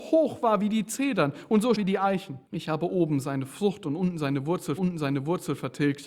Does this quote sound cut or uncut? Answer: cut